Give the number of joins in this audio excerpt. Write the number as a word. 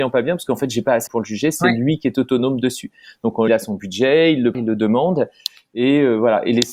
three